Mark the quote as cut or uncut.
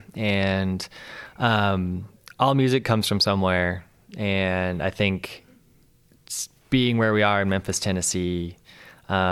uncut